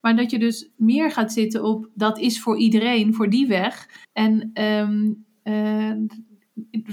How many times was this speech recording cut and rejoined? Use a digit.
1